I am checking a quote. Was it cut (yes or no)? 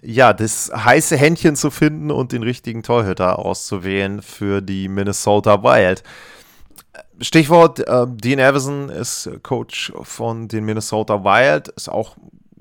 no